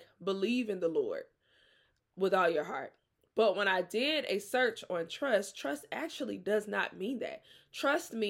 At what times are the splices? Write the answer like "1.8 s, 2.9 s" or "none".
none